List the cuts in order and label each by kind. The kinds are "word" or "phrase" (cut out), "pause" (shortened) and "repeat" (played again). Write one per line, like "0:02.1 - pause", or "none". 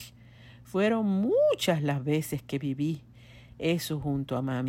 none